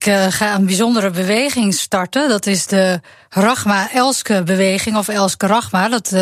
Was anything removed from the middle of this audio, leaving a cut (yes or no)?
no